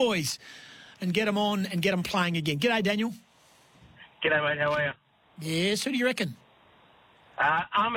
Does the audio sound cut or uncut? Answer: uncut